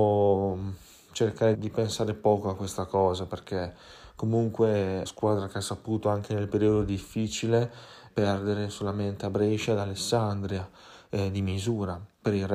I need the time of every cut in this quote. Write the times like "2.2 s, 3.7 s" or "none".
1.5 s, 5.0 s, 8.1 s